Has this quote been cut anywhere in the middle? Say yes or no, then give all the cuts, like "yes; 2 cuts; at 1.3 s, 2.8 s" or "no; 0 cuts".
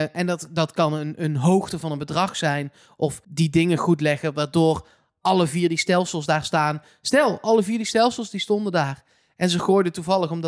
yes; 1 cut; at 3.2 s